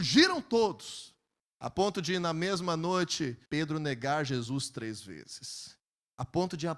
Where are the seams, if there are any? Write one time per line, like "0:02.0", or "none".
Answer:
0:03.5